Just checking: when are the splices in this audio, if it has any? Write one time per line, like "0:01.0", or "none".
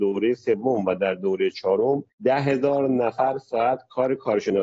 0:02.1